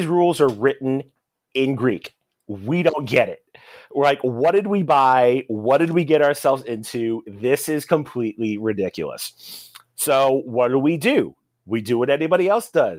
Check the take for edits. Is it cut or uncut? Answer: uncut